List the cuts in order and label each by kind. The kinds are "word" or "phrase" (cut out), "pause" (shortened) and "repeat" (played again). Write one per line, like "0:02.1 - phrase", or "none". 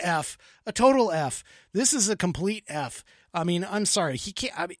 none